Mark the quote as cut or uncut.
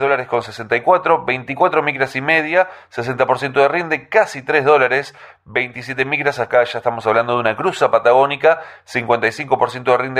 uncut